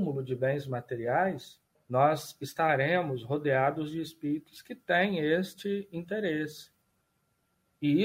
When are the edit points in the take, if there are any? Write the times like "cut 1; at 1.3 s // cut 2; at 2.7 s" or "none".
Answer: cut 1; at 1.8 s